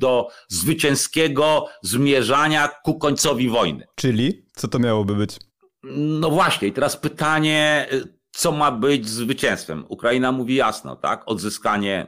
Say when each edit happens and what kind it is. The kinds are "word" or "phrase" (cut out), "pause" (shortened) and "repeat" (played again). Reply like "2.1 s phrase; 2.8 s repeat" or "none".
3.9 s pause